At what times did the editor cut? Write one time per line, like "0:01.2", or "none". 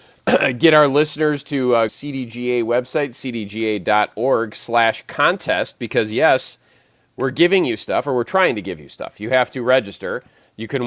0:01.9